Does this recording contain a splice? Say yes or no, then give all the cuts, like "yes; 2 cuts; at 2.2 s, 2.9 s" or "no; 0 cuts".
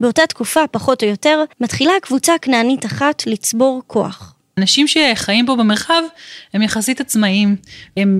yes; 1 cut; at 1.5 s